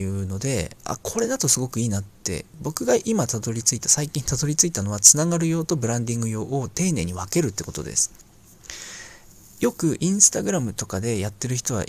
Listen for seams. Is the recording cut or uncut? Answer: uncut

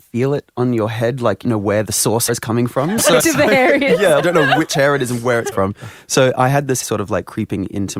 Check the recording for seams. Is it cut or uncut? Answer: cut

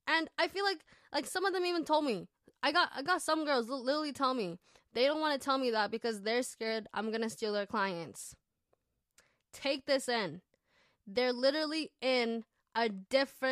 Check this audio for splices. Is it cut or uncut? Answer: uncut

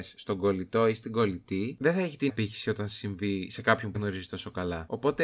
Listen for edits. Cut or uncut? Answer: cut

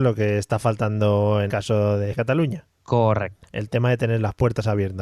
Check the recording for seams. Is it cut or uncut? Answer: cut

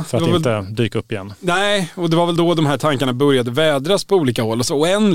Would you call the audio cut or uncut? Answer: uncut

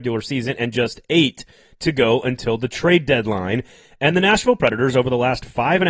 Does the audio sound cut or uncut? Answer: uncut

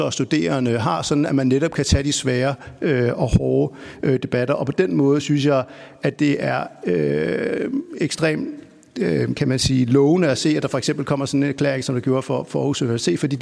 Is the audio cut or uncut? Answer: uncut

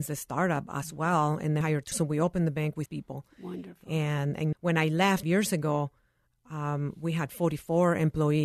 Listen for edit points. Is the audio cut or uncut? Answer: cut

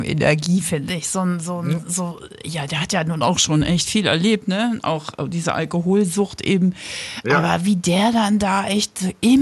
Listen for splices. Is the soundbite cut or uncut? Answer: uncut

